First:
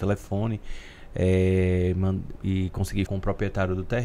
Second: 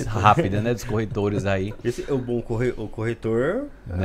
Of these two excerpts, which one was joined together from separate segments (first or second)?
first